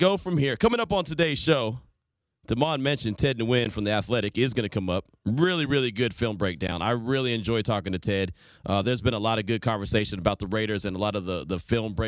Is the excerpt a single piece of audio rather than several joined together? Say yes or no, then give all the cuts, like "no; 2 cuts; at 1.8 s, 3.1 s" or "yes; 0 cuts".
yes; 0 cuts